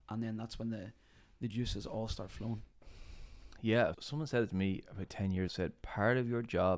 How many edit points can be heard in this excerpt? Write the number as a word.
two